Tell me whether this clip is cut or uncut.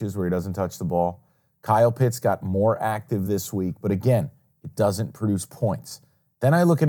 uncut